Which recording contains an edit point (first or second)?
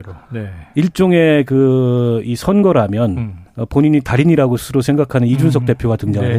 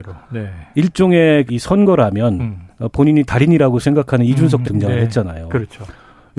second